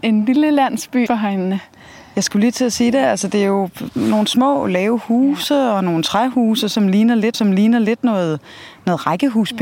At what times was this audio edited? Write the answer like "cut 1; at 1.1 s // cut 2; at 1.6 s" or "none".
cut 1; at 1.1 s // cut 2; at 7.3 s